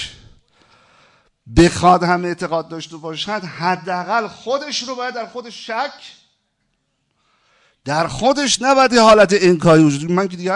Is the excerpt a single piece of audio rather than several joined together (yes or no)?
yes